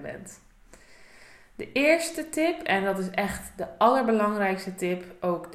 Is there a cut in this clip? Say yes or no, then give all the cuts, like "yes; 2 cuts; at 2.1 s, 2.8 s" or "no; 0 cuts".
no; 0 cuts